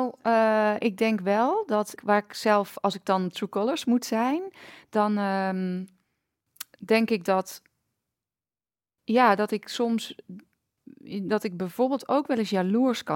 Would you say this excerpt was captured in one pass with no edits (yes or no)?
no